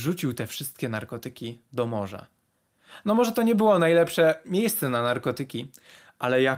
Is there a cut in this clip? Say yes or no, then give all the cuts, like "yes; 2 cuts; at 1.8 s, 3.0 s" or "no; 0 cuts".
no; 0 cuts